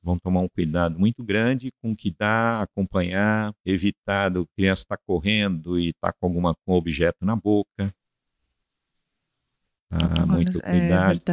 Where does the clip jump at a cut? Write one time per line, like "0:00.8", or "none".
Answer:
0:03.6
0:10.1